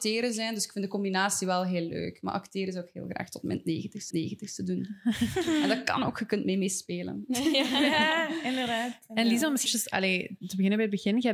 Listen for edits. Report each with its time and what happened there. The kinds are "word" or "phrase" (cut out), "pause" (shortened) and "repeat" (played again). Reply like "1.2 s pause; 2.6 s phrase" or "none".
4.1 s repeat; 9.7 s word